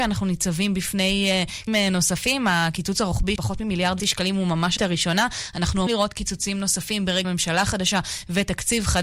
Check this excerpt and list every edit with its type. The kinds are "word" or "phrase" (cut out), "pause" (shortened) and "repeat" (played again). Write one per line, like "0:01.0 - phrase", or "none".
0:01.7 - word
0:03.4 - word
0:04.0 - word
0:04.8 - word
0:05.9 - word
0:07.2 - word